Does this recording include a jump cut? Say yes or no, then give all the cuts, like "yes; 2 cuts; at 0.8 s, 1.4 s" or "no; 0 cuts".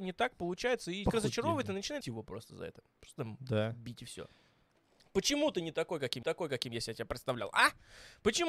yes; 3 cuts; at 1.1 s, 2.0 s, 6.2 s